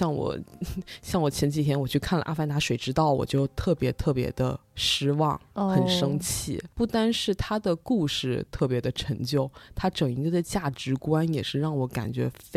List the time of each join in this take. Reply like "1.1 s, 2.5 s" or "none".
6.7 s

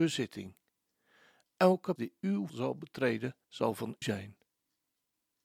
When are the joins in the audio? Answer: 2.0 s, 2.5 s, 3.4 s, 4.0 s

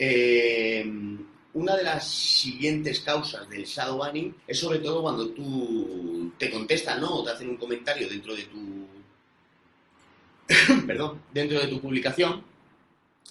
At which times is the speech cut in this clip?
4.4 s

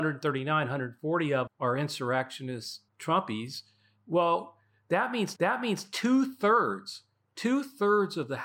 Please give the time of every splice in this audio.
1.5 s, 2.9 s, 5.4 s

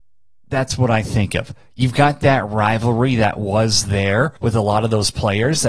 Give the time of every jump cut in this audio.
4.4 s

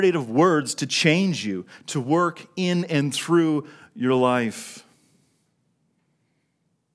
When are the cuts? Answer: none

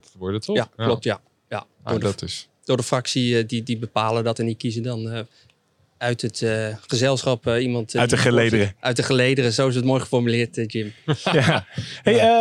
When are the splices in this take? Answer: 1.7 s

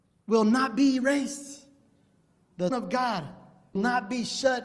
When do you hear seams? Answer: 2.7 s, 3.8 s

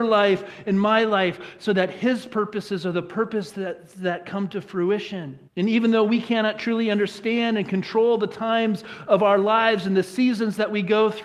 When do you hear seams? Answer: 5.5 s

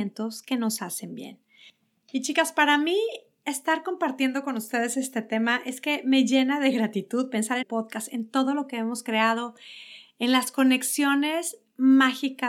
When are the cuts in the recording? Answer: 7.6 s

